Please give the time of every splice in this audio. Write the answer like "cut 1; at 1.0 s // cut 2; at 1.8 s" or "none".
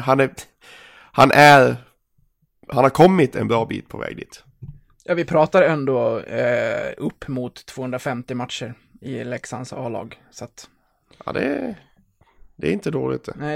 none